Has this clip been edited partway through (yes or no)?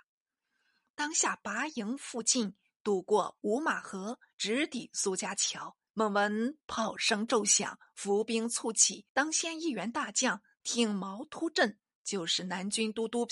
yes